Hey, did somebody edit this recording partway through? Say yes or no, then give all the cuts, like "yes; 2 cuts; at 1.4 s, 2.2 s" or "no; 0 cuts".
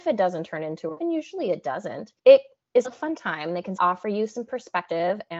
yes; 4 cuts; at 1.0 s, 2.2 s, 2.8 s, 3.8 s